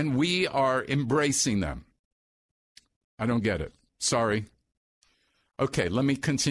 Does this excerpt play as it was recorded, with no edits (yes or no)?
yes